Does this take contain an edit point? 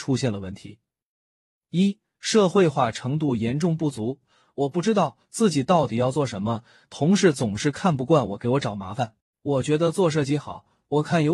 yes; 1 cut; at 9.2 s

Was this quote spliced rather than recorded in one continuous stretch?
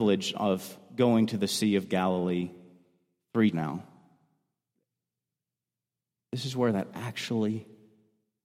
yes; 1 cut; at 3.5 s

